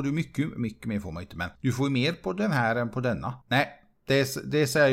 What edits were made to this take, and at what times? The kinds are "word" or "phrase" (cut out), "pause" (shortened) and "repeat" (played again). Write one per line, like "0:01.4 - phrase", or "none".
0:01.5 - pause
0:03.4 - pause